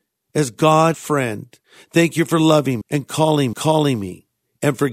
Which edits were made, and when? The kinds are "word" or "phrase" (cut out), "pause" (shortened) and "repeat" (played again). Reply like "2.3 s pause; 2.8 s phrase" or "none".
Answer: 0.9 s word; 1.6 s pause; 2.8 s word; 3.5 s repeat